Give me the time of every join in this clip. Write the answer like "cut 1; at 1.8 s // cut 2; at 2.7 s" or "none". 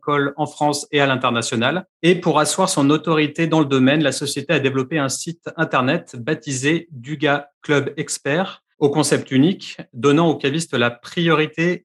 cut 1; at 1.9 s // cut 2; at 8.7 s